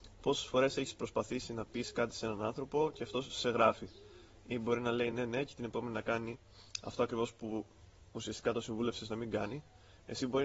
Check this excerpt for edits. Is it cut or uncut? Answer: uncut